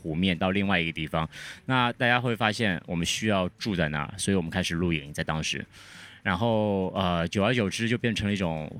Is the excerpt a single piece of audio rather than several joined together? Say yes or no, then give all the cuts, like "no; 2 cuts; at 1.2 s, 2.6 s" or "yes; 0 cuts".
yes; 0 cuts